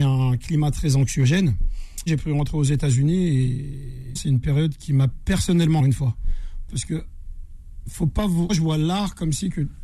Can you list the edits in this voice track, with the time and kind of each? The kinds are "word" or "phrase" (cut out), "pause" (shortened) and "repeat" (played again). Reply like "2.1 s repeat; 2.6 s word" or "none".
2.1 s word; 4.2 s word; 5.1 s word; 5.8 s word; 6.7 s word; 8.5 s word